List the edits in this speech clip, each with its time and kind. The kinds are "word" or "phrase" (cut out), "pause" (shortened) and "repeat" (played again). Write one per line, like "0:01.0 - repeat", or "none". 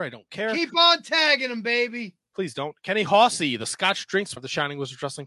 0:04.4 - word